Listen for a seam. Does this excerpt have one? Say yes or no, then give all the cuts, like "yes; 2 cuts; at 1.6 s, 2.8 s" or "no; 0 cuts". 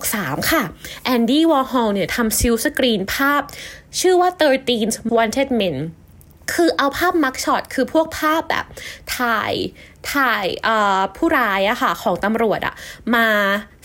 yes; 1 cut; at 5.1 s